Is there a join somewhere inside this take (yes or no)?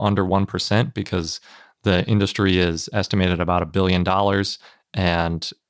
no